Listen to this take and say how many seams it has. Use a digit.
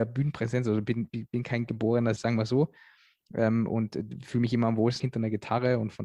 3